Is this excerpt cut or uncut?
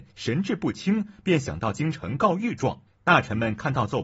cut